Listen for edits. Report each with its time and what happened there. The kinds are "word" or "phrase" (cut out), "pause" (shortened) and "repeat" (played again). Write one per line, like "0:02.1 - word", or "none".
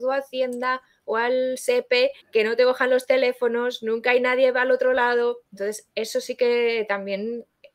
0:02.2 - pause
0:05.5 - pause